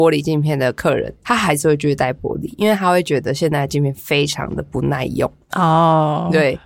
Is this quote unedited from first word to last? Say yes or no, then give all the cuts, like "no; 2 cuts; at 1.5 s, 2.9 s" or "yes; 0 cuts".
no; 1 cut; at 1.2 s